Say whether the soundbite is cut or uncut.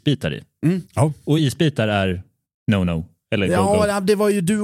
uncut